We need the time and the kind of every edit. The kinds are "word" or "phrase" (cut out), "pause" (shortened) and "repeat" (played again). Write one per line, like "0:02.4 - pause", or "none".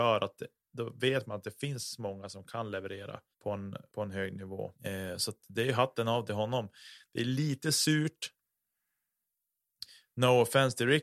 0:03.3 - pause
0:03.9 - pause
0:04.8 - pause